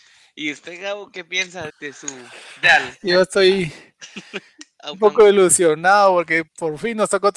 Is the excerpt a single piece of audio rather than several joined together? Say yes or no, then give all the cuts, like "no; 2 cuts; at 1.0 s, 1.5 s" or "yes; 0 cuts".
no; 5 cuts; at 1.1 s, 1.7 s, 2.6 s, 4.9 s, 6.5 s